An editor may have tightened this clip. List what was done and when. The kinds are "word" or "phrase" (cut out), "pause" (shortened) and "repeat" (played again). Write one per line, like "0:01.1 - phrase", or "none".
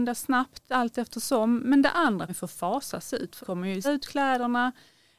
0:02.3 - word
0:03.4 - word
0:03.8 - word

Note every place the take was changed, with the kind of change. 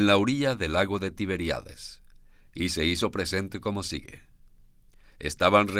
none

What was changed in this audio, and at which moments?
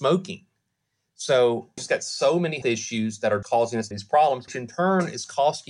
0:01.8 - word
0:02.6 - word
0:03.4 - word
0:03.9 - word
0:04.5 - word

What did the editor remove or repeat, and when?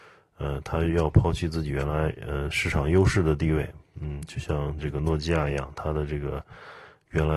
none

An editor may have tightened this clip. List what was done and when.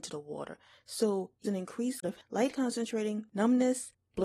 0:01.4 - word
0:02.0 - word
0:02.5 - phrase

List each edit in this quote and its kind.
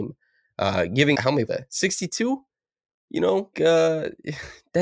0:01.1 - word
0:01.5 - word
0:03.5 - word

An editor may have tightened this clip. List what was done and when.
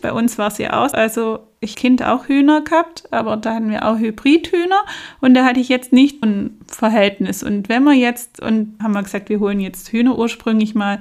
0:00.9 - word
0:01.7 - phrase
0:06.2 - word
0:08.8 - word

